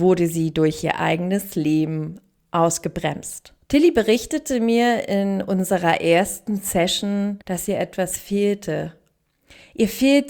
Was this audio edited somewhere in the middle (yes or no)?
yes